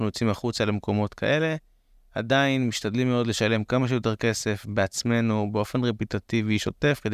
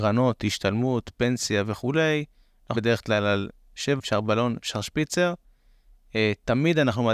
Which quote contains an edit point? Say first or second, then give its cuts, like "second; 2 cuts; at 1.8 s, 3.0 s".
second; 2 cuts; at 2.7 s, 4.0 s